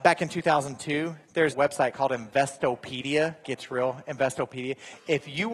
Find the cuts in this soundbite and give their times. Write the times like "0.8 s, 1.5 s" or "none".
1.5 s, 3.4 s